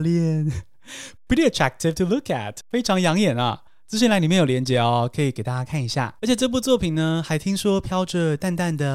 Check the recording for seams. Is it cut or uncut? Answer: cut